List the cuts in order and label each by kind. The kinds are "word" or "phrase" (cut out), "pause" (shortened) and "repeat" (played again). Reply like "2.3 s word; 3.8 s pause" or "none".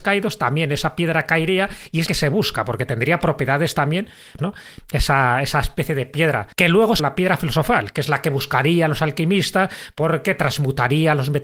2.1 s word; 4.4 s word; 6.5 s pause; 7.0 s phrase